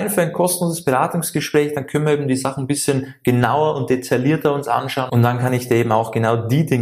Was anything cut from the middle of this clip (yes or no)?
no